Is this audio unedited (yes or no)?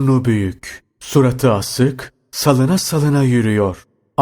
yes